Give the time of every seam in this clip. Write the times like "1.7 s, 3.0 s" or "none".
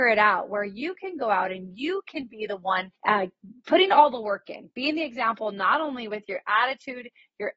3.0 s